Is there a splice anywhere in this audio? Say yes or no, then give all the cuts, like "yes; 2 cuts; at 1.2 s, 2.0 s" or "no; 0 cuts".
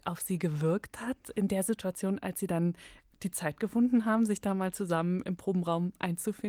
no; 0 cuts